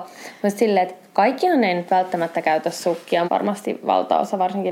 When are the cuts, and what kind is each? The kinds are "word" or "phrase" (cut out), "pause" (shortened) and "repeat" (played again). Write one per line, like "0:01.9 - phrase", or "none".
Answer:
0:03.2 - word